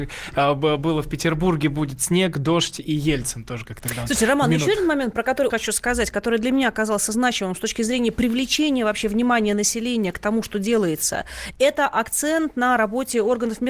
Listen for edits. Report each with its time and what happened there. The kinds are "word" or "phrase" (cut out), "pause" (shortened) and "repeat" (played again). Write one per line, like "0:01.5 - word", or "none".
0:05.5 - word